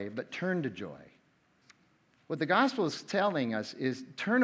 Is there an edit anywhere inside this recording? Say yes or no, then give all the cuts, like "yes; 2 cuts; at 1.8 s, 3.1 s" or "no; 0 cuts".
no; 0 cuts